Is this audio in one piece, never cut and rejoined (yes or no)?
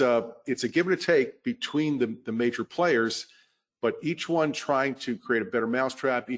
yes